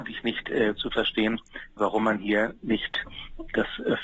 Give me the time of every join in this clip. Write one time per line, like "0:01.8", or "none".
none